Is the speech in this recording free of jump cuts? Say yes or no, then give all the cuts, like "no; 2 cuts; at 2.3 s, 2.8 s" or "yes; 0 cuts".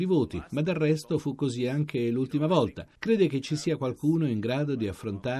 yes; 0 cuts